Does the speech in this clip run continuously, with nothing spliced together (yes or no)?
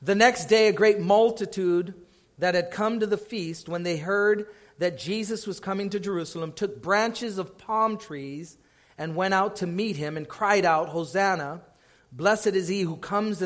yes